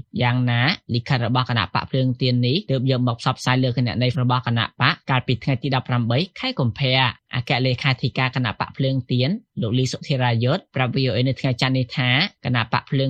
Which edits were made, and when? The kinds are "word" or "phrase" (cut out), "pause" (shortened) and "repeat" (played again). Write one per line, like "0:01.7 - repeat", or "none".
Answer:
0:04.1 - word